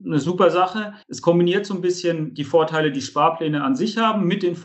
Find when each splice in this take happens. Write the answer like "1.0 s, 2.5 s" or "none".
1.0 s